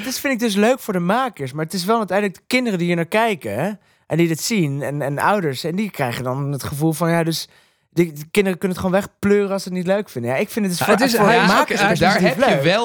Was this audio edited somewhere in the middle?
no; 0 cuts

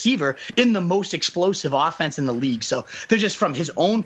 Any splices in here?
no; 0 cuts

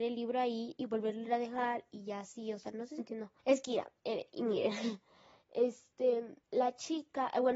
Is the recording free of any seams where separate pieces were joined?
no; 4 cuts; at 3.0 s, 3.4 s, 4.0 s, 6.4 s

